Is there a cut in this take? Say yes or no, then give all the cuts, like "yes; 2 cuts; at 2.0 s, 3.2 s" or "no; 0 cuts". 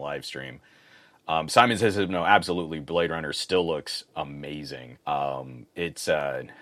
yes; 1 cut; at 5.0 s